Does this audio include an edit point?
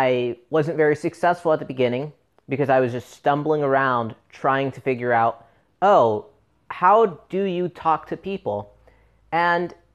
no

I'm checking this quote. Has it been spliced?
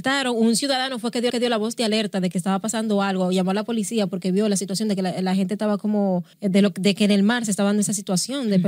yes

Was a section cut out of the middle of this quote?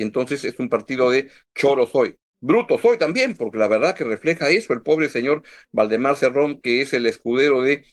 no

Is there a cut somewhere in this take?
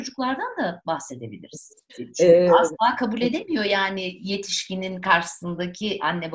yes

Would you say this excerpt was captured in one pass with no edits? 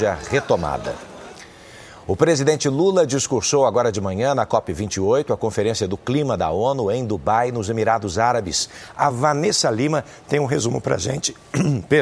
yes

